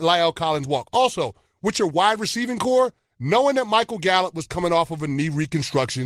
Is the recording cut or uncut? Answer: uncut